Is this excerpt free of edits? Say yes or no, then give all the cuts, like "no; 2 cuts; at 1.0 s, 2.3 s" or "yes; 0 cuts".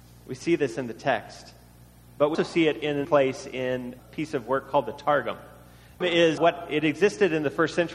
no; 5 cuts; at 2.3 s, 3.0 s, 4.0 s, 6.0 s, 6.4 s